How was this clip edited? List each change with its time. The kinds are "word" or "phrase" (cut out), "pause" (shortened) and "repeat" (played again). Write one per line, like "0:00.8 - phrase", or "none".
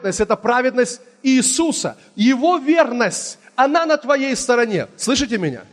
none